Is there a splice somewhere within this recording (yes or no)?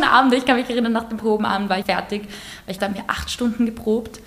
yes